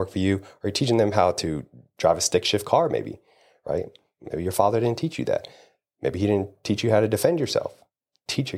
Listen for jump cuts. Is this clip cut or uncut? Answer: uncut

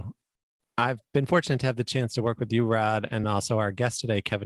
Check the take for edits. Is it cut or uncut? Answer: uncut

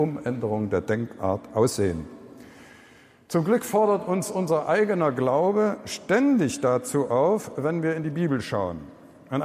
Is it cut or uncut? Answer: uncut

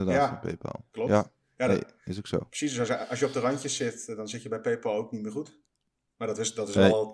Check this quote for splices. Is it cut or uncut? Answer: uncut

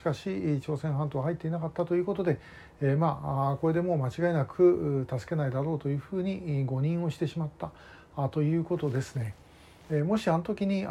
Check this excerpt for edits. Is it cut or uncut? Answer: uncut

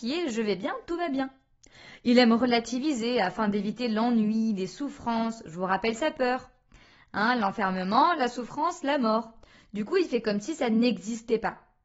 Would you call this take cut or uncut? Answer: uncut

